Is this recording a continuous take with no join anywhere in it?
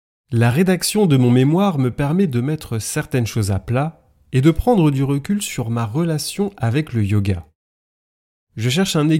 yes; 0 cuts

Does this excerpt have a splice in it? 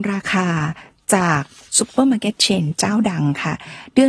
no; 0 cuts

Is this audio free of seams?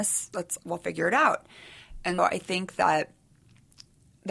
no; 1 cut; at 2.2 s

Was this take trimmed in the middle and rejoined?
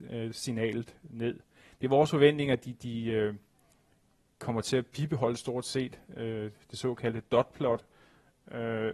no; 0 cuts

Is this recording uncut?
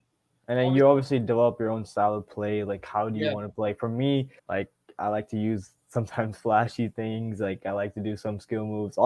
no; 1 cut; at 4.4 s

